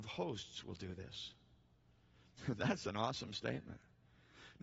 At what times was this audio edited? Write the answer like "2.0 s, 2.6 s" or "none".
none